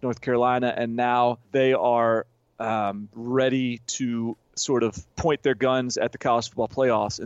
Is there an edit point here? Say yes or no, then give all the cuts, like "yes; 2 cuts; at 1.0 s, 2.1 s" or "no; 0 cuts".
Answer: yes; 3 cuts; at 1.4 s, 4.4 s, 5.1 s